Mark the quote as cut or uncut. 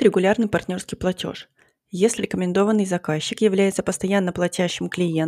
cut